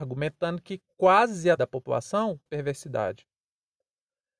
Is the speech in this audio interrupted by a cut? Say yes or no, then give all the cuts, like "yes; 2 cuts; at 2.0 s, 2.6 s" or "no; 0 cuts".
yes; 2 cuts; at 1.6 s, 2.5 s